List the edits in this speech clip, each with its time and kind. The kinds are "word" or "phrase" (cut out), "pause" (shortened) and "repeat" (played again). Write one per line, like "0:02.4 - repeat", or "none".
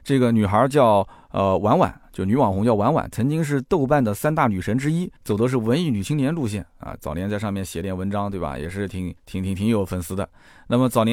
0:05.2 - pause
0:09.2 - pause